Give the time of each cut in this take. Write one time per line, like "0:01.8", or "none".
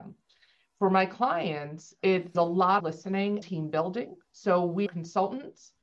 0:02.3
0:02.8
0:03.4
0:04.2
0:04.9